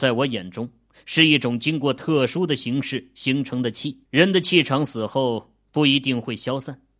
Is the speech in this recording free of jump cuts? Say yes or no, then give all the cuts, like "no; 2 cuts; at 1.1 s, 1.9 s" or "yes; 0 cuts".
no; 1 cut; at 4.1 s